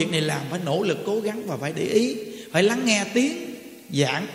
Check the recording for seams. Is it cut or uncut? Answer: uncut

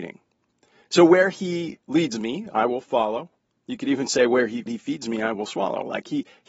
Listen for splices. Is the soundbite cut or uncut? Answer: cut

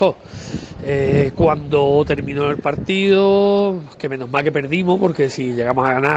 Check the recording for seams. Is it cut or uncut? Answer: uncut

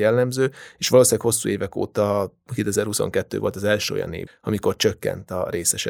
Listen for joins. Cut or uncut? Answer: cut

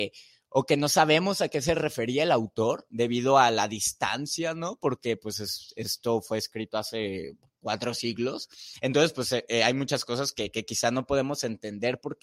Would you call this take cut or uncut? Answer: uncut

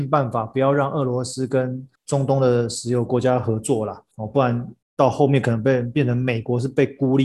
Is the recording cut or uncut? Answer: cut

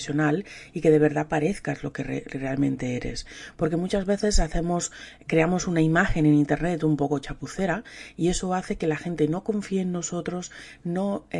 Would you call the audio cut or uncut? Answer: uncut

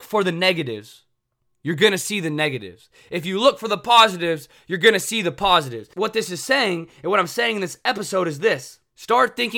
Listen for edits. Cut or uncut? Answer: uncut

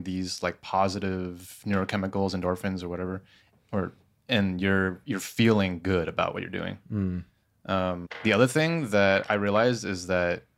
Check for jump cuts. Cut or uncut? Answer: uncut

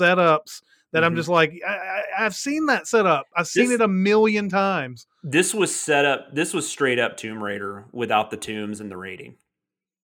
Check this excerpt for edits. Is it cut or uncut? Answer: uncut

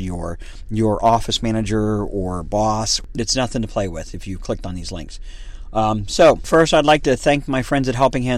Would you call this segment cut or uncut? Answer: uncut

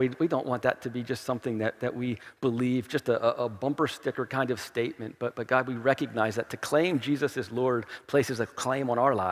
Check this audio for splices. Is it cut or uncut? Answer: uncut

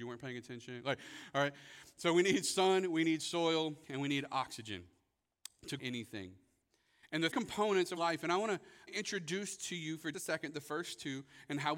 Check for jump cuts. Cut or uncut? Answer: cut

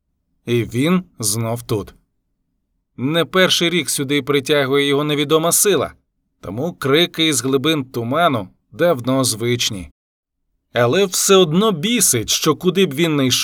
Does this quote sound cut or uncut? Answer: uncut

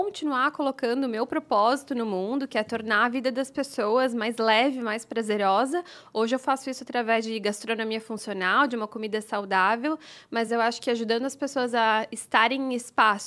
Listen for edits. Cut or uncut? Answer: uncut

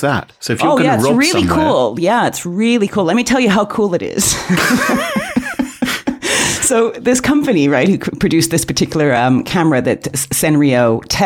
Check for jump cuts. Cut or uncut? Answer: uncut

